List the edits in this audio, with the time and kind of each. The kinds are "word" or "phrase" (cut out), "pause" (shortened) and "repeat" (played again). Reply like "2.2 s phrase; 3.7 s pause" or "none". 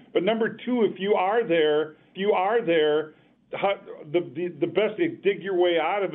2.1 s repeat; 5.0 s word